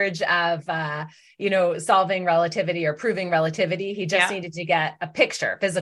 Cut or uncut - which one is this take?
uncut